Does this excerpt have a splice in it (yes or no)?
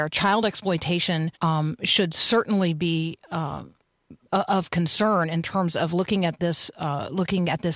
yes